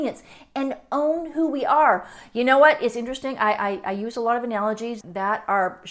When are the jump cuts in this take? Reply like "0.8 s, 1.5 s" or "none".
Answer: 5.0 s